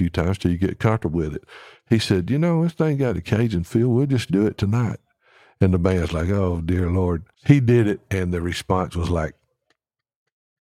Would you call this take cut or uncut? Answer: cut